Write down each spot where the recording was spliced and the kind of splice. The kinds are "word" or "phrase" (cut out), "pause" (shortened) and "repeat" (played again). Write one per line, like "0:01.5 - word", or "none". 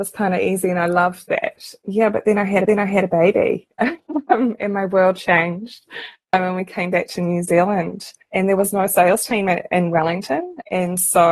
0:02.6 - repeat
0:08.2 - pause